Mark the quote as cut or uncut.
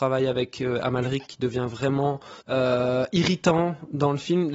cut